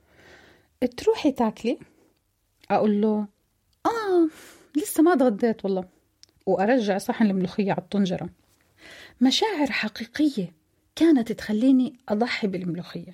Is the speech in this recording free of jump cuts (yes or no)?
yes